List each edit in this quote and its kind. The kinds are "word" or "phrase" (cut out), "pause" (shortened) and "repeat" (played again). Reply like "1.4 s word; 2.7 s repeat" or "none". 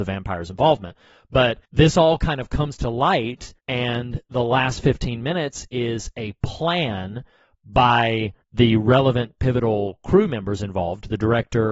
1.7 s pause; 3.6 s pause; 8.4 s pause

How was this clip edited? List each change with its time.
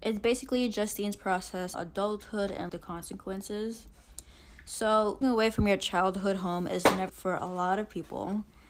1.7 s word; 2.7 s word; 5.2 s word; 7.1 s word

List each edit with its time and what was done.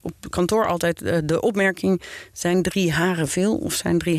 none

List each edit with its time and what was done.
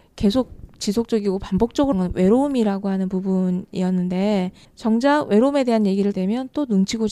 1.9 s word; 4.6 s pause; 6.1 s word

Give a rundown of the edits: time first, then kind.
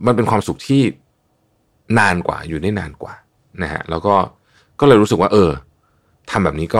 none

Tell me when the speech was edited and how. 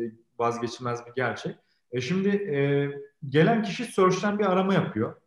none

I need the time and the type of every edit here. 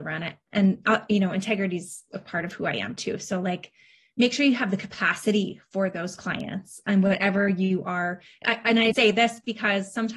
8.9 s word

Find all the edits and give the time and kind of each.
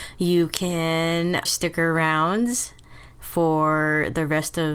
1.5 s word

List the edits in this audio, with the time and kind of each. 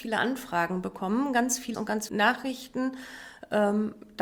1.7 s word; 2.1 s word

